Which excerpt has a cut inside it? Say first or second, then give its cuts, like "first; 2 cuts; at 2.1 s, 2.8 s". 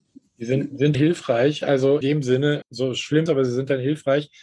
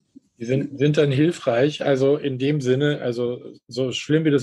first; 4 cuts; at 0.9 s, 2.0 s, 2.6 s, 3.3 s